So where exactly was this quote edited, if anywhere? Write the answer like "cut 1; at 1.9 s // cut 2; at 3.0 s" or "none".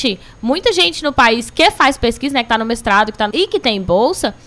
cut 1; at 3.3 s

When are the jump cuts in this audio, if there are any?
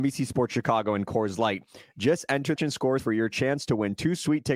cut 1; at 2.6 s // cut 2; at 3.0 s

